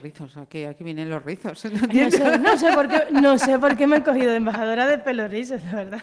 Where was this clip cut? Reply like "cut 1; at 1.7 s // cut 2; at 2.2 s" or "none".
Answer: none